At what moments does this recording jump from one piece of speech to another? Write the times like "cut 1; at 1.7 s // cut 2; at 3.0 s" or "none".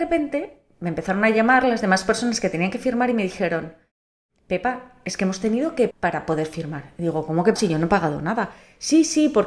cut 1; at 5.9 s // cut 2; at 7.6 s